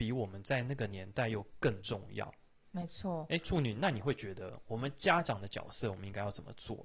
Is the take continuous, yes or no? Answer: yes